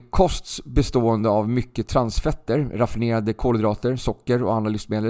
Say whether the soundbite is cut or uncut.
uncut